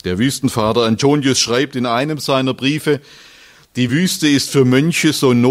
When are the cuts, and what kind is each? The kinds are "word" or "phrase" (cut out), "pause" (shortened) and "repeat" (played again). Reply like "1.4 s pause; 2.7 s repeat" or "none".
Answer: none